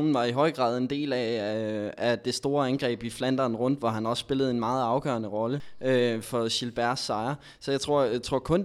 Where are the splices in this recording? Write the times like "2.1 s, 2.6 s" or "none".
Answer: 6.2 s